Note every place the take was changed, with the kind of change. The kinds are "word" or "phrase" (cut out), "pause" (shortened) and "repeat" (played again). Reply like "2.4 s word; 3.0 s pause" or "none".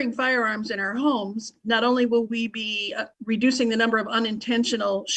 3.1 s pause